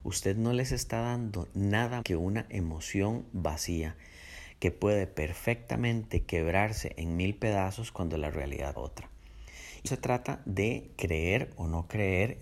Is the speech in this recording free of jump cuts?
no; 3 cuts; at 2.0 s, 8.8 s, 9.9 s

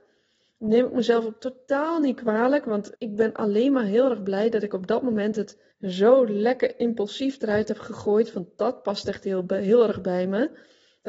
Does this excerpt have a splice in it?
yes; 2 cuts; at 2.9 s, 5.7 s

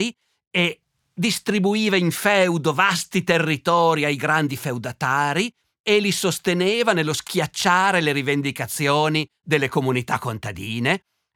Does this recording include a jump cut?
no; 0 cuts

